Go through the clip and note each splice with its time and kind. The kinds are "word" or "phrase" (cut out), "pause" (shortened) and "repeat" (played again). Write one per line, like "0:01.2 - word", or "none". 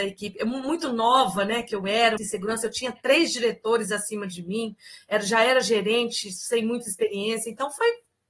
0:02.2 - word